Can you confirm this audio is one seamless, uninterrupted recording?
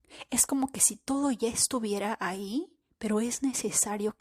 no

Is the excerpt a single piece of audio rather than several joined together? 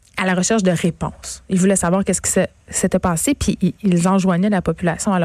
yes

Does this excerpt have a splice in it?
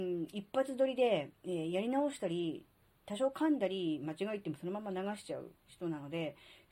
yes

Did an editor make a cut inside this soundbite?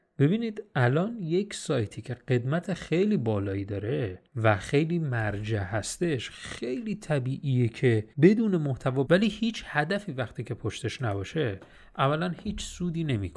yes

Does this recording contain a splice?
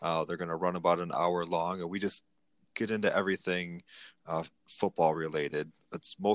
no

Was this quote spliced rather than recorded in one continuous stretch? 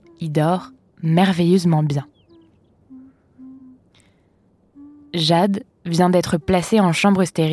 no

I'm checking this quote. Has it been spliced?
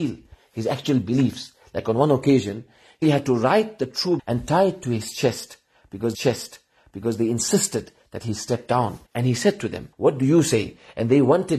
yes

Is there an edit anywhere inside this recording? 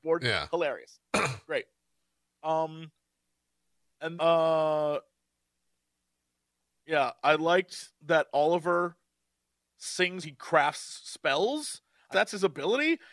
yes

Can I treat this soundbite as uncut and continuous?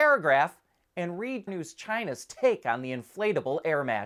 no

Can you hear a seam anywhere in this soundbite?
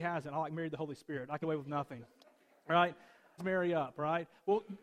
yes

